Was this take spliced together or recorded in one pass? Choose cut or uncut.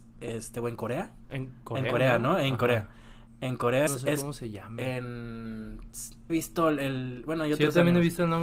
cut